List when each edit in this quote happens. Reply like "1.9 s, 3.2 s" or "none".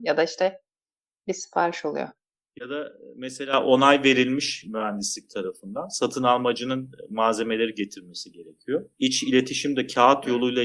2.3 s, 8.9 s